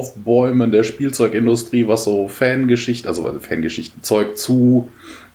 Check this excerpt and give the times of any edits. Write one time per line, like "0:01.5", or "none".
0:03.9